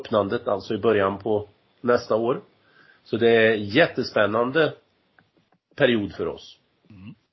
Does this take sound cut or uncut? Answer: uncut